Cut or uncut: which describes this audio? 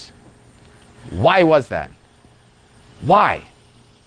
uncut